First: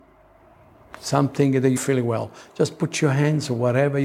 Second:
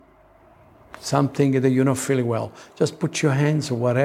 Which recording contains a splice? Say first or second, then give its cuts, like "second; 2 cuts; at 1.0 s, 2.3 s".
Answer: first; 1 cut; at 1.8 s